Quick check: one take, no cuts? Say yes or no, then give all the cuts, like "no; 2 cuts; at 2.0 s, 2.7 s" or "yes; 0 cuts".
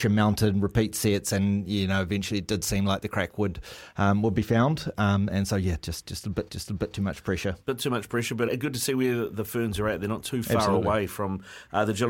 no; 3 cuts; at 6.5 s, 7.6 s, 8.5 s